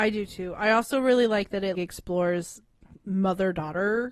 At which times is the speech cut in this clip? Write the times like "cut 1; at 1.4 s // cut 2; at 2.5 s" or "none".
cut 1; at 1.7 s